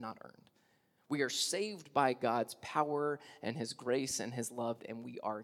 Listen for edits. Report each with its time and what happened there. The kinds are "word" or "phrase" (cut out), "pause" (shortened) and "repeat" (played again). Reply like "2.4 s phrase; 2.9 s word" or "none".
none